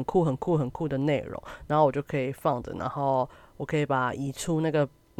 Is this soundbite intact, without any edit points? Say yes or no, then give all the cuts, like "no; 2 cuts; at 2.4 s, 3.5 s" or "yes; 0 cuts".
yes; 0 cuts